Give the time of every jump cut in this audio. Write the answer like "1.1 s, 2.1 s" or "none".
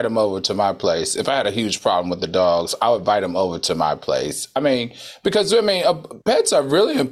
6.2 s